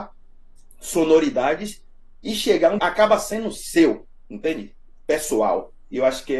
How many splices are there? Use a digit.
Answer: 1